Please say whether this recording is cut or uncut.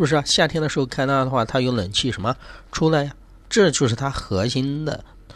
uncut